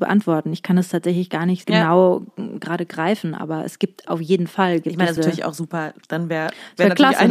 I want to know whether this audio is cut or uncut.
cut